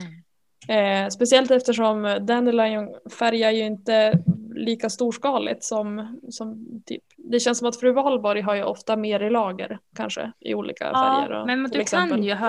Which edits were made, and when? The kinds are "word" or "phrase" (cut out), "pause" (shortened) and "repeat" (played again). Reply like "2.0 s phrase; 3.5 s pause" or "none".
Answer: 7.1 s pause